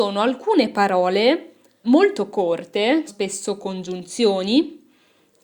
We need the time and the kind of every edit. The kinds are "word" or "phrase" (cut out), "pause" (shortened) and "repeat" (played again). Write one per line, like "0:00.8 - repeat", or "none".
0:01.8 - word
0:03.1 - word